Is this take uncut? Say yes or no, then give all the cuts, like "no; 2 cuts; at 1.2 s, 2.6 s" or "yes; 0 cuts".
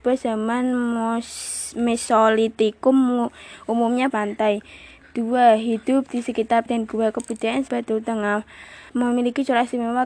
no; 4 cuts; at 4.1 s, 6.7 s, 7.7 s, 8.9 s